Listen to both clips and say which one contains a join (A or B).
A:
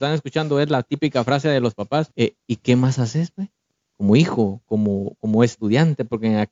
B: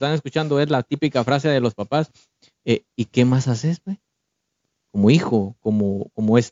A